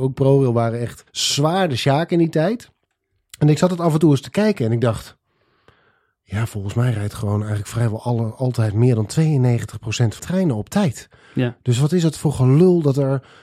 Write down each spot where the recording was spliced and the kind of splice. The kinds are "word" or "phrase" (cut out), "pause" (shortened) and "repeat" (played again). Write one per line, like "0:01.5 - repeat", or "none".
0:01.1 - pause
0:10.2 - word